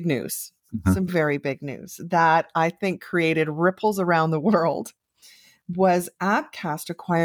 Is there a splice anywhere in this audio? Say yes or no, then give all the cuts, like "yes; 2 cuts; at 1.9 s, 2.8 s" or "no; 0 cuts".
no; 0 cuts